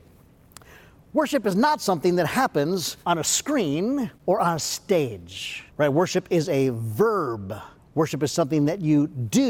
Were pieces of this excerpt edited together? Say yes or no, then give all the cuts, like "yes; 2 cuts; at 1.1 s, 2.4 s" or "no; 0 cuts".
yes; 4 cuts; at 3.0 s, 4.2 s, 5.7 s, 7.8 s